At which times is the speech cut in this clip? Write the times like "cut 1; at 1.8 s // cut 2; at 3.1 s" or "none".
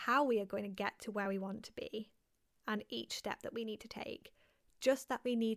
none